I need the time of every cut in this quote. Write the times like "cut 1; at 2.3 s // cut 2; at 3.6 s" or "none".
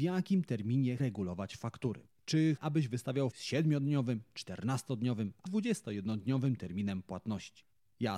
cut 1; at 1.0 s // cut 2; at 2.6 s // cut 3; at 3.3 s // cut 4; at 5.5 s